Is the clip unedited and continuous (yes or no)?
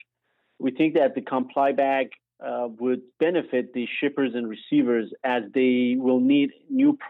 yes